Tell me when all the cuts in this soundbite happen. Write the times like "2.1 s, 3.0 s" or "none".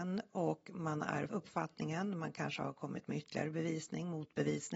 1.3 s